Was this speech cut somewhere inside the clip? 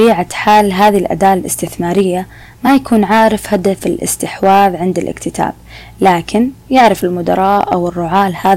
no; 0 cuts

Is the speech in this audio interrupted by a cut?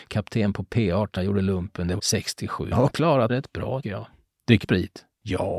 yes; 6 cuts; at 1.2 s, 2.0 s, 2.7 s, 3.3 s, 3.8 s, 4.6 s

